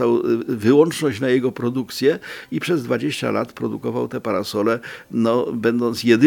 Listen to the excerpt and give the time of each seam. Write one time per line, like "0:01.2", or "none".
none